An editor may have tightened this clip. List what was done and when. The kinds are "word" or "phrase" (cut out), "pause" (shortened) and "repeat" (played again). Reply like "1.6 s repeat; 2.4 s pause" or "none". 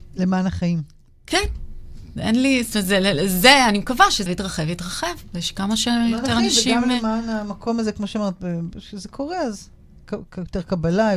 4.3 s word